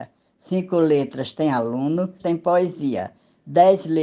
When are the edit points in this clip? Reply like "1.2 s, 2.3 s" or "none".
2.2 s